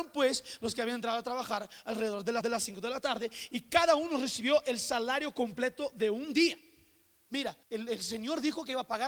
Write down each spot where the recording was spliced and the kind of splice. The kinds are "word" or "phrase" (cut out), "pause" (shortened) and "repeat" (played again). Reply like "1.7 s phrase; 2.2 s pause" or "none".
2.4 s repeat; 7.6 s pause